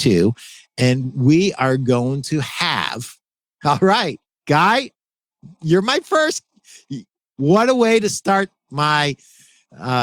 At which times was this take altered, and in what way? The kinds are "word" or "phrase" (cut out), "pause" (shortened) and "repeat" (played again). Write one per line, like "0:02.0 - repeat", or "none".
none